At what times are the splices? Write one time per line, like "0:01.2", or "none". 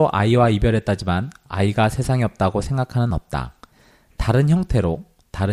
0:03.1